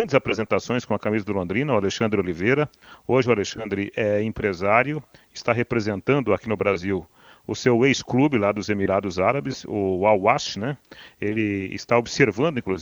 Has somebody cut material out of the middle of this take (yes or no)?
no